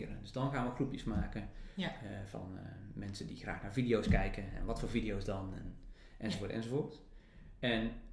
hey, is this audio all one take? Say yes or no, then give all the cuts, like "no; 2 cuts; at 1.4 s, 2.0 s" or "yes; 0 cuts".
yes; 0 cuts